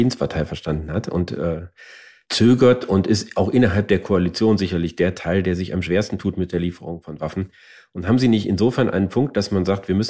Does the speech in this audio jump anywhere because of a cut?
no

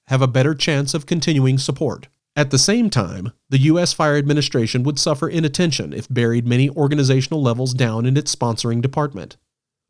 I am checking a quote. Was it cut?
yes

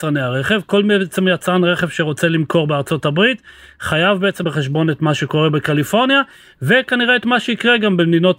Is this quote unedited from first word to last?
no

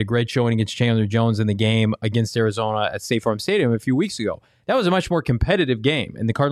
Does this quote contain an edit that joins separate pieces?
no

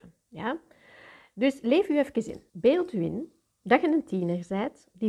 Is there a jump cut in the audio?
yes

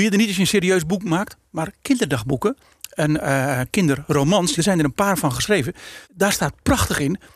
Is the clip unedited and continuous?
no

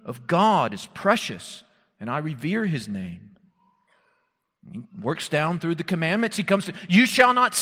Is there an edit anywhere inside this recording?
no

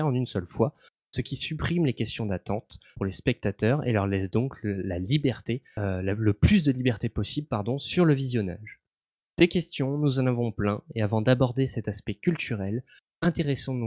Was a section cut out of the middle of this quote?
no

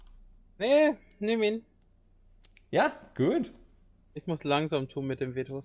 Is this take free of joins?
yes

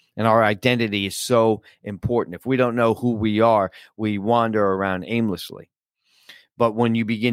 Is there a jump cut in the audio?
no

